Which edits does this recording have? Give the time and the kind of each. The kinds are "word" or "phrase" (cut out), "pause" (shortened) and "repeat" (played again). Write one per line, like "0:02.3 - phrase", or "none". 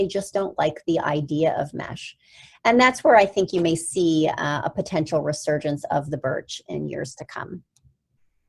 none